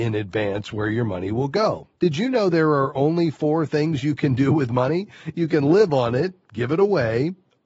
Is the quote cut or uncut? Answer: cut